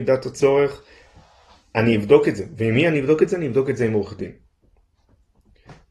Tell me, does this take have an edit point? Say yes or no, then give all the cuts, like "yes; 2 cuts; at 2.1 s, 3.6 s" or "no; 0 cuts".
no; 0 cuts